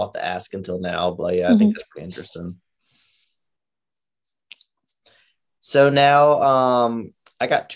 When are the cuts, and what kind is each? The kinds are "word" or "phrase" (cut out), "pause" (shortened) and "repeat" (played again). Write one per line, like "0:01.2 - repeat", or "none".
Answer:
none